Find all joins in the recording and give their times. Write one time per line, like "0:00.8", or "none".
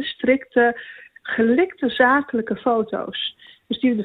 none